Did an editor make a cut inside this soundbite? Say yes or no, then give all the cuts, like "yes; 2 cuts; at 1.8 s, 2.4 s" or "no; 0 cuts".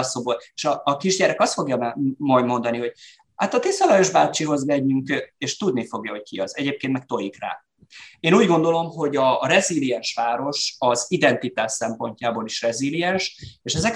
no; 0 cuts